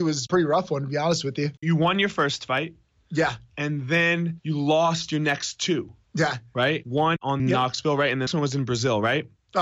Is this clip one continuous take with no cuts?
no; 3 cuts; at 1.6 s, 7.4 s, 8.3 s

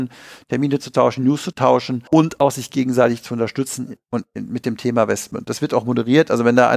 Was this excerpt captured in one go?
yes; 0 cuts

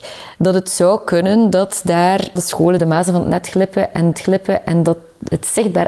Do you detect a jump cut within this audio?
yes; 3 cuts; at 2.4 s, 2.8 s, 4.1 s

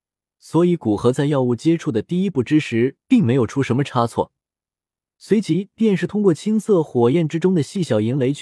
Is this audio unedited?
yes; 0 cuts

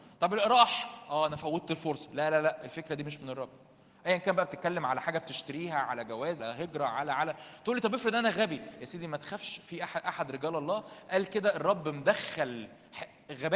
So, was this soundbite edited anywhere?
yes; 1 cut; at 6.4 s

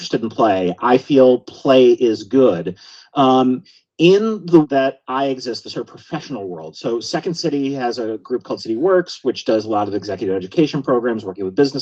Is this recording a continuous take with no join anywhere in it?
no; 3 cuts; at 4.6 s, 7.0 s, 8.6 s

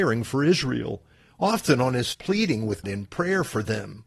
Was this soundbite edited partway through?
yes; 2 cuts; at 2.1 s, 2.8 s

